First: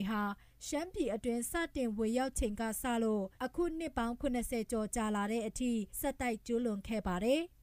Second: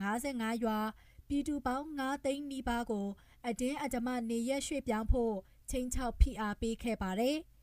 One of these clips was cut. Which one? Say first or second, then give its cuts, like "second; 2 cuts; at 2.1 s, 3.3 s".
first; 2 cuts; at 3.4 s, 5.9 s